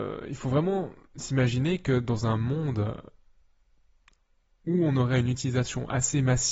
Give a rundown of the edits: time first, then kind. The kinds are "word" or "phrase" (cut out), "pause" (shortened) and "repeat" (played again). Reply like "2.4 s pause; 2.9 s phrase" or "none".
none